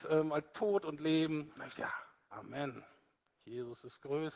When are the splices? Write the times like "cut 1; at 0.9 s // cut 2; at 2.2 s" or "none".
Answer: cut 1; at 1.7 s // cut 2; at 2.3 s